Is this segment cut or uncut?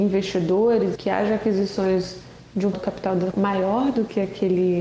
cut